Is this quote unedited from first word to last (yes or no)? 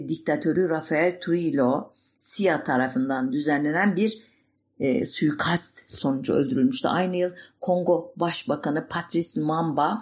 yes